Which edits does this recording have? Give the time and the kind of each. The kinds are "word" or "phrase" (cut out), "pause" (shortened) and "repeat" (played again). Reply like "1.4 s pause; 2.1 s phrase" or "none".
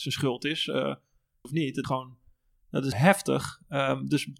1.4 s word; 1.8 s word; 2.9 s word